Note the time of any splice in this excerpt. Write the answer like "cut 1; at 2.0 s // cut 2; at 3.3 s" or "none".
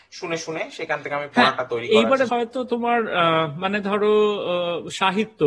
cut 1; at 2.3 s